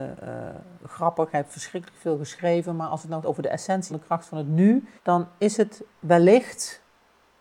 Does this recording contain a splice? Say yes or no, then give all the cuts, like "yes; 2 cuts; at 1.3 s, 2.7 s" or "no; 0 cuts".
yes; 3 cuts; at 3.2 s, 3.9 s, 5.0 s